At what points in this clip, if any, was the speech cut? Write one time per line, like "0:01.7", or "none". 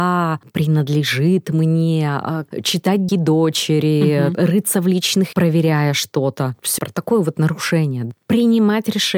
0:03.1
0:05.3
0:06.8